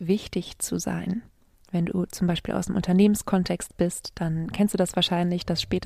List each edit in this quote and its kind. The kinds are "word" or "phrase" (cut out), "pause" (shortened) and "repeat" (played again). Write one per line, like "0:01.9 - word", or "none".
none